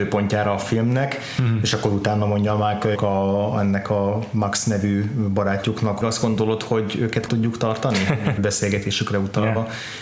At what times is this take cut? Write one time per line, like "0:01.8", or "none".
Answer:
0:03.0
0:06.0
0:07.3
0:08.4